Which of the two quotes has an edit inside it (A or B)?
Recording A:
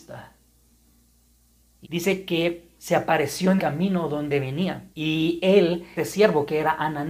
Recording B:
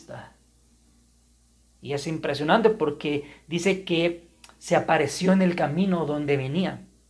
A